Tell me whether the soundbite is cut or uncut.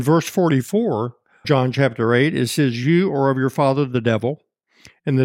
cut